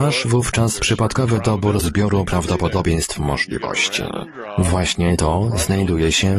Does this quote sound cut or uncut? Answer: cut